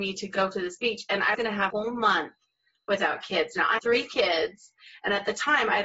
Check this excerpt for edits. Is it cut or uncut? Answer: cut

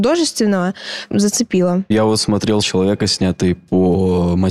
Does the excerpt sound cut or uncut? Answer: cut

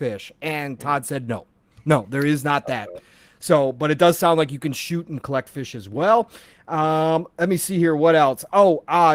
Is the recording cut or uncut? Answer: uncut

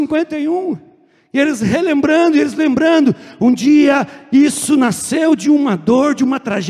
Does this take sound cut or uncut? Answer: uncut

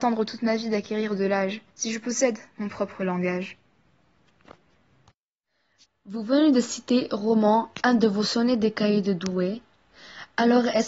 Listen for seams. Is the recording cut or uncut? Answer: uncut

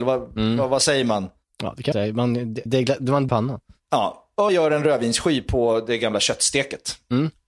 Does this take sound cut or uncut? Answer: cut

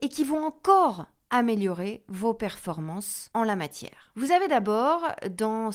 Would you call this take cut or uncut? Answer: uncut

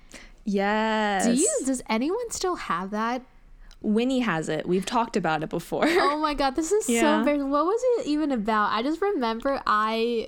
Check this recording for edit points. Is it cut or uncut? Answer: uncut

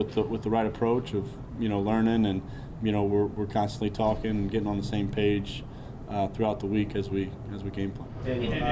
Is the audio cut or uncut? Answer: uncut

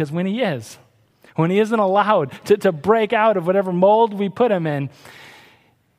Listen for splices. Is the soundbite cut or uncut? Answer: uncut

